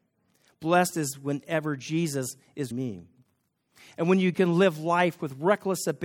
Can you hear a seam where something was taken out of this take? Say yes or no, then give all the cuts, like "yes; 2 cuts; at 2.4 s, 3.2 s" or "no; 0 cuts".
yes; 2 cuts; at 2.7 s, 4.3 s